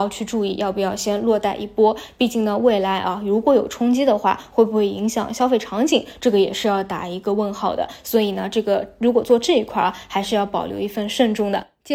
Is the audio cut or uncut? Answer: uncut